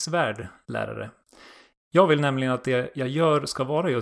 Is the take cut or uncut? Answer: uncut